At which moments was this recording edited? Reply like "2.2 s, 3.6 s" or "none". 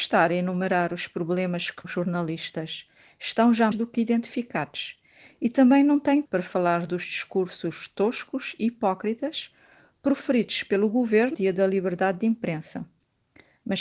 1.8 s, 3.7 s, 6.3 s, 11.3 s